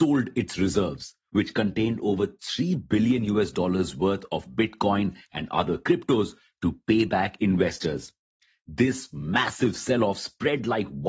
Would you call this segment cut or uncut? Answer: uncut